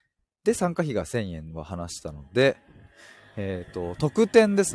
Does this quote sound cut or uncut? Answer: uncut